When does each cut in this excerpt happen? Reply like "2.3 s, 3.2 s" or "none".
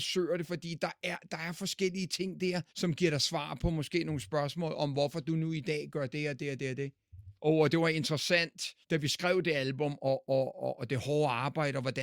2.7 s, 7.4 s, 8.8 s